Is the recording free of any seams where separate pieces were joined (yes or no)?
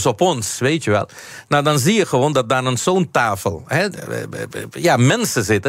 yes